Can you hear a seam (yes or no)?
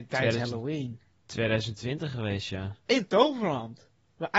no